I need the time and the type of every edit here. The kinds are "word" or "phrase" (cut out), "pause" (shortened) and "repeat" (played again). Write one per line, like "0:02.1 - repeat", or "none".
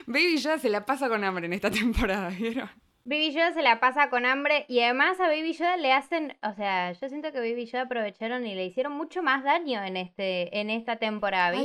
none